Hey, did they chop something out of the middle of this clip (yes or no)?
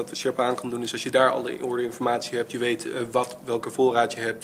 no